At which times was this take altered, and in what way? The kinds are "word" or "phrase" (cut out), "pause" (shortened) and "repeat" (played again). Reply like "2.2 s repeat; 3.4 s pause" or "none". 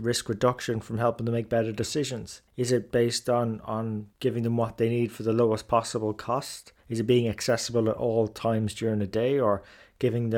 2.5 s pause; 6.8 s pause